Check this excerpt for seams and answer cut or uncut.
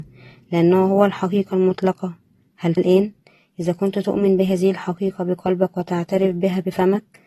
cut